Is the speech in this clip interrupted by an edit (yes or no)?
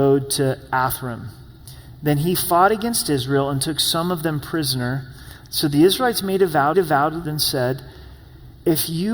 yes